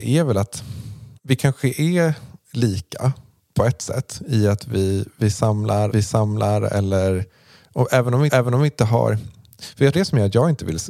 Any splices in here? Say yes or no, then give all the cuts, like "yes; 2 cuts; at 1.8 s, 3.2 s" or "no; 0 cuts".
yes; 5 cuts; at 1.2 s, 3.4 s, 5.9 s, 8.3 s, 9.9 s